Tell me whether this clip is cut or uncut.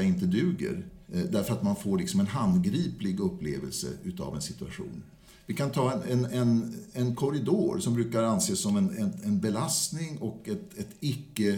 cut